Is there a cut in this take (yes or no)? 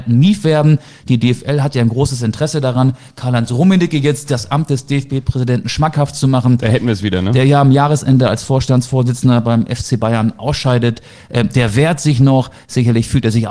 no